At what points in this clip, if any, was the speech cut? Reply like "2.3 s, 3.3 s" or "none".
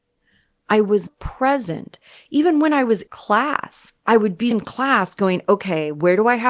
1.1 s, 3.1 s, 4.0 s, 4.5 s